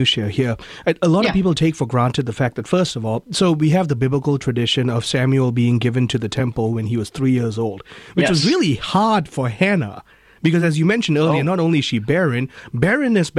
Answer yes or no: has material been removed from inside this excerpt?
no